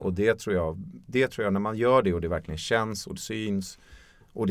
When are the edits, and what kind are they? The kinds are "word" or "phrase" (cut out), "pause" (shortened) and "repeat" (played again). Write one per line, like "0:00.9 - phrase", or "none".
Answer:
none